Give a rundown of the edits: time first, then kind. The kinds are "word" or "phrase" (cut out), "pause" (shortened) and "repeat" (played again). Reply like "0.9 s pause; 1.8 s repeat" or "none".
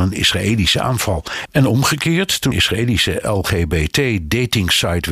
2.5 s word